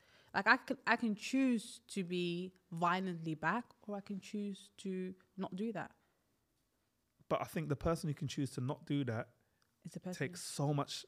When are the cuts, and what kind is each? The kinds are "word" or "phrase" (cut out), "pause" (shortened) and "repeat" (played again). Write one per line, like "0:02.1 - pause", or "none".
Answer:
none